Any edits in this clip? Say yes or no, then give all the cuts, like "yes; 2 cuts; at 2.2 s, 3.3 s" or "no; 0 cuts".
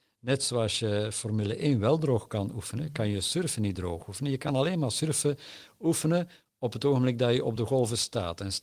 no; 0 cuts